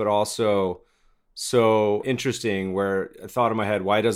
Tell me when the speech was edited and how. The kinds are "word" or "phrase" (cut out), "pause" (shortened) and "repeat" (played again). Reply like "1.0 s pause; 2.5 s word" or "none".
none